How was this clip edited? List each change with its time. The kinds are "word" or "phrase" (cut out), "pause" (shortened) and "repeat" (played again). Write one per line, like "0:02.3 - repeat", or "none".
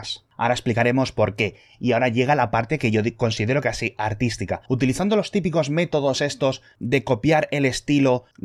0:04.7 - pause